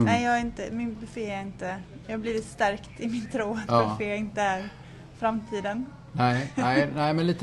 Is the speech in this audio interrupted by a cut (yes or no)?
no